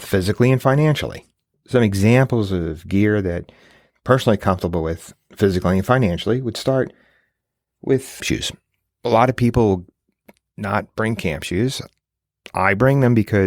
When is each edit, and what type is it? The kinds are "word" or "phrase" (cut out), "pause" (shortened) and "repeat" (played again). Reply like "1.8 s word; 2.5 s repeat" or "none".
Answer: 1.5 s pause; 8.2 s phrase